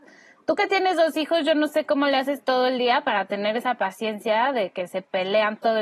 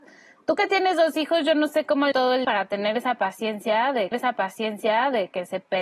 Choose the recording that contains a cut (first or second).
second